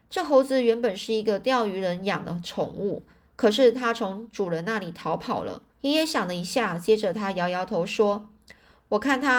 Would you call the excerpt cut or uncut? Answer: cut